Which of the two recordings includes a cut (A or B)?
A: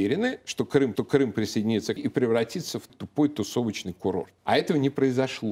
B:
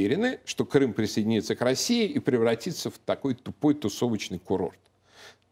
A